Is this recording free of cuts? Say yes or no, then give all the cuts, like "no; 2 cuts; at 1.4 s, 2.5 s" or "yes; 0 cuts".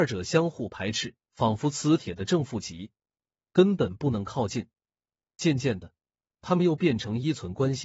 no; 1 cut; at 1.2 s